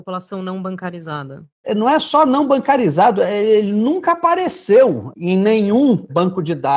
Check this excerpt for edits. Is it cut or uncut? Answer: uncut